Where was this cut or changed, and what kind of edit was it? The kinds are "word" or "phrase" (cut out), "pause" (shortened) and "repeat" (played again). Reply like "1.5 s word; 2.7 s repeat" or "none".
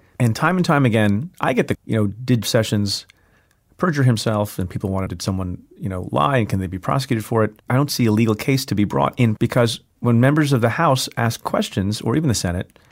1.7 s word; 2.4 s word; 5.1 s word; 7.6 s pause; 9.4 s word